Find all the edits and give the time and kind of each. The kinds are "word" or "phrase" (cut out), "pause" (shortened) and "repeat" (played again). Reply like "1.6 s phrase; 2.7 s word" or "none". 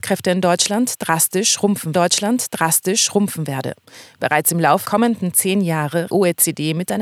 1.9 s repeat; 4.8 s word; 6.1 s phrase